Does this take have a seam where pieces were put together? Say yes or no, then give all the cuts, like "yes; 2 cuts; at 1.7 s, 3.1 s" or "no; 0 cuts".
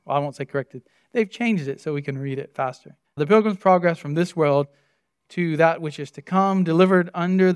yes; 1 cut; at 3.0 s